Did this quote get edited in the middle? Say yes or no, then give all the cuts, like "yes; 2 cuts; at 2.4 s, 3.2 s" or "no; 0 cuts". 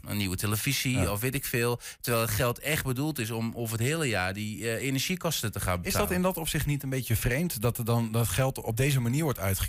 no; 0 cuts